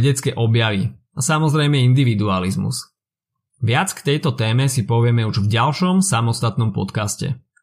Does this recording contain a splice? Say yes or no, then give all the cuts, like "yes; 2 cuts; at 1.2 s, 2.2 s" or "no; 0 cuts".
no; 0 cuts